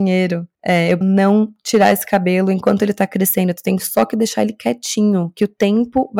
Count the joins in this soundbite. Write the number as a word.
one